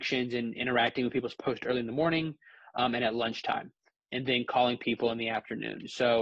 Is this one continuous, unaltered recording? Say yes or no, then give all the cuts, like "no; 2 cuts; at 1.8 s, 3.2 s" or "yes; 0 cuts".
yes; 0 cuts